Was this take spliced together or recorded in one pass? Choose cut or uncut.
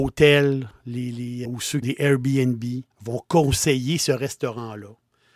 cut